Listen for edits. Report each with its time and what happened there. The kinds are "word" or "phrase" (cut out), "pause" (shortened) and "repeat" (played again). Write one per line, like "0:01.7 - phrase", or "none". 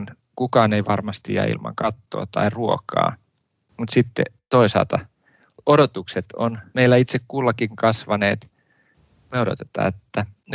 none